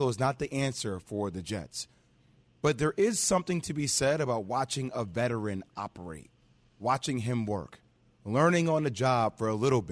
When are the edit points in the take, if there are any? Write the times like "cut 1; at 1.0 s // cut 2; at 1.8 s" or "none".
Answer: none